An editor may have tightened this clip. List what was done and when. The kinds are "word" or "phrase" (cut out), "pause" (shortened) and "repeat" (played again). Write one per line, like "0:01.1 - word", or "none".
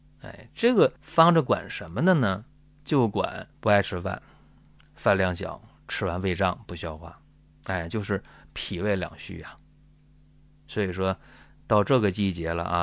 0:01.0 - pause
0:03.5 - pause
0:07.5 - pause